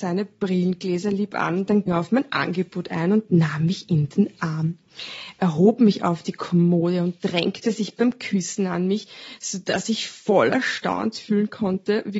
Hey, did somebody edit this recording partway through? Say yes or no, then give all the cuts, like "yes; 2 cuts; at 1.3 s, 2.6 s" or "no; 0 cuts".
yes; 1 cut; at 1.9 s